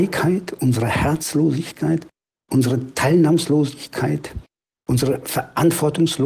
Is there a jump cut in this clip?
no; 0 cuts

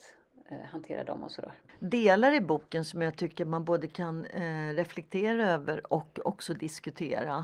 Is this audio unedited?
yes; 0 cuts

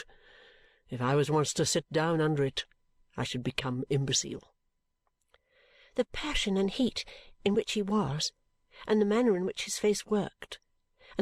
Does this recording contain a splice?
no; 0 cuts

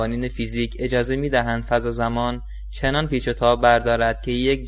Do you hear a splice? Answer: no; 0 cuts

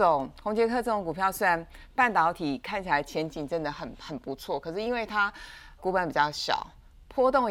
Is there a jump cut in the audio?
yes; 1 cut; at 5.8 s

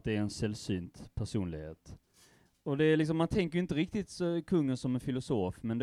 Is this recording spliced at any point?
no; 0 cuts

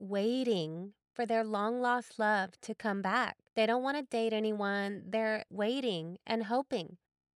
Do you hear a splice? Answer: yes; 2 cuts; at 3.5 s, 5.5 s

